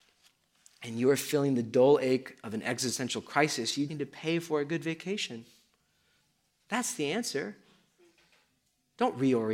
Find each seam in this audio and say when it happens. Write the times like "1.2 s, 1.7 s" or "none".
3.9 s